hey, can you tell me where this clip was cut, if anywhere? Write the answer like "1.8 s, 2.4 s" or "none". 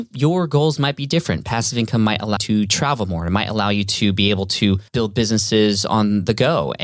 2.4 s, 4.9 s